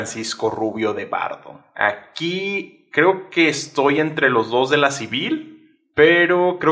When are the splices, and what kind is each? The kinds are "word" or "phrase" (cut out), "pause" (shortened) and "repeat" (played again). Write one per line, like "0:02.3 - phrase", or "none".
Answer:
none